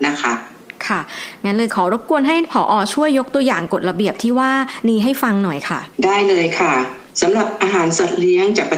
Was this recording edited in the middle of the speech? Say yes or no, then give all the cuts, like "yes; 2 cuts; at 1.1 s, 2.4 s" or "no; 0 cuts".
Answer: yes; 2 cuts; at 5.9 s, 7.1 s